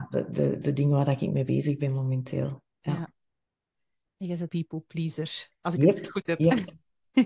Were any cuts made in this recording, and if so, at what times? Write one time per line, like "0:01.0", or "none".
0:04.5